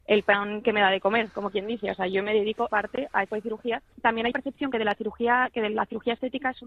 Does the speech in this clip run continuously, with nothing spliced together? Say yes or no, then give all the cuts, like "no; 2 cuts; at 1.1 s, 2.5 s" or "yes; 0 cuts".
no; 5 cuts; at 2.7 s, 3.3 s, 3.9 s, 4.3 s, 4.7 s